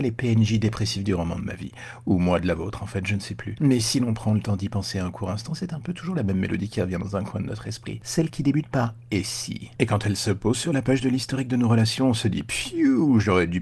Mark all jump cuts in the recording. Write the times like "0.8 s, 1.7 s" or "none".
9.1 s

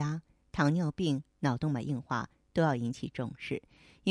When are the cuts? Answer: 1.3 s

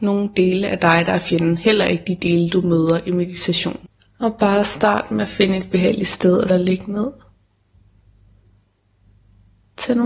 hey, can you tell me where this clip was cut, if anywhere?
6.5 s

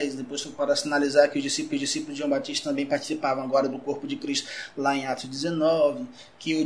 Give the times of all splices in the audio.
1.7 s

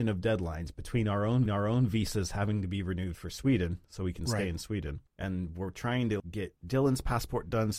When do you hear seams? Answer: 1.5 s, 5.1 s, 6.2 s

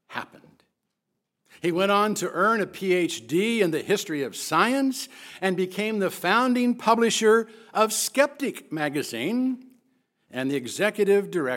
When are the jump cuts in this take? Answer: none

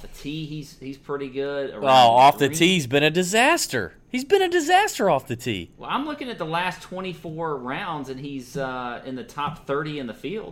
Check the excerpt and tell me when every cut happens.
none

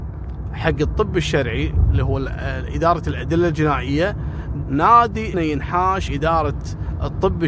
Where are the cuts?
4.6 s, 5.3 s, 6.1 s

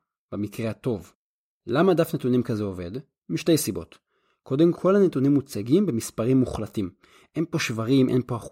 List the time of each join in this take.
4.7 s

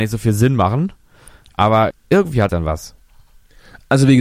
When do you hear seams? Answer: 1.9 s, 2.5 s

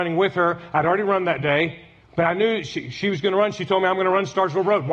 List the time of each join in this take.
2.0 s

